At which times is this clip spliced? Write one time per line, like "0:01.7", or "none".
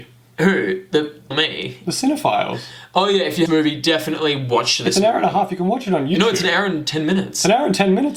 0:01.3
0:03.5